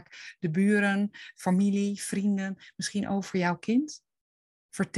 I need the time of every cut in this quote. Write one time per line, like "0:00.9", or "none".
none

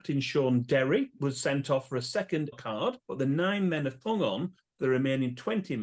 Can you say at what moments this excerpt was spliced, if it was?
0:01.2
0:02.5
0:03.0
0:04.0

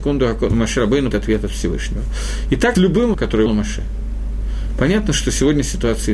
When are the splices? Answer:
0:01.1
0:02.7
0:03.1
0:03.5

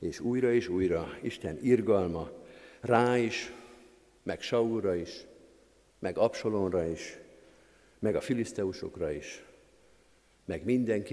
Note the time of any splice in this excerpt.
none

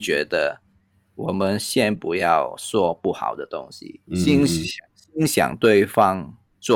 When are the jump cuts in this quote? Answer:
0:04.0

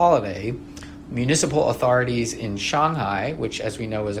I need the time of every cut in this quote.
none

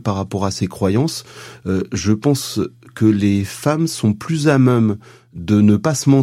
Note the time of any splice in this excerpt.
none

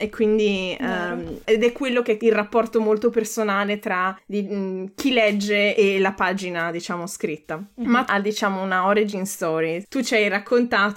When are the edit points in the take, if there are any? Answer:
0:02.2
0:05.7
0:08.1

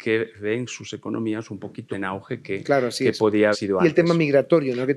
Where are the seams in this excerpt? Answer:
0:01.9
0:03.5

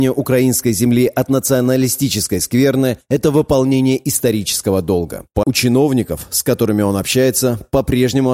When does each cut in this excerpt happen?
0:05.4

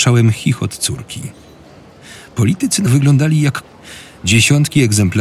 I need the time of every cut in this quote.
0:02.9
0:03.6

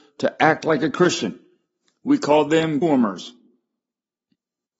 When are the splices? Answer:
0:02.8

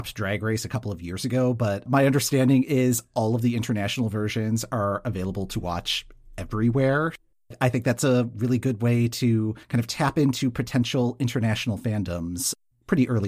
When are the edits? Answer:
0:01.9
0:09.6

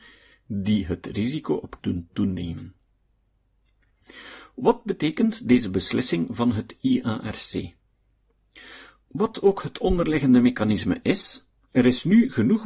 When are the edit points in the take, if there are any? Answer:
0:01.8

